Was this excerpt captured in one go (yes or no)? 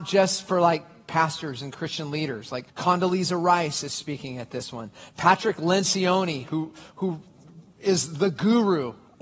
no